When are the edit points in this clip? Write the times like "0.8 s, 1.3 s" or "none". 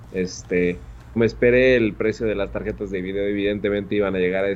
1.2 s

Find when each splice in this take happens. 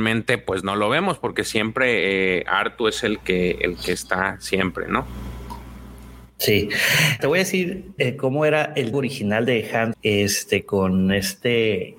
7.2 s, 8.0 s, 8.9 s, 9.9 s

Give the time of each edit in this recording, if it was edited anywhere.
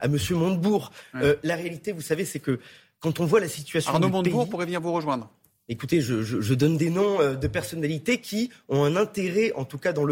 none

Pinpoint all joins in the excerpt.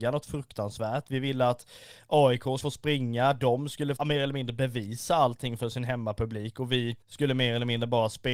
2.6 s, 4.0 s, 7.0 s

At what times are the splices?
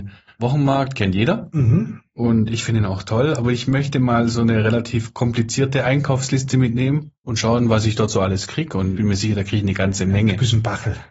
7.1 s, 8.9 s

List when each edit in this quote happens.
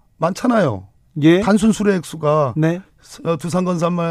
none

